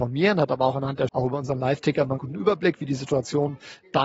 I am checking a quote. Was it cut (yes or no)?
yes